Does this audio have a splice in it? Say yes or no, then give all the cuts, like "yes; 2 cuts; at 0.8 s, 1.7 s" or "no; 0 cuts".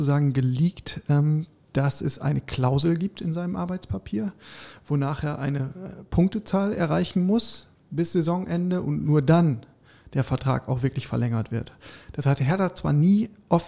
no; 0 cuts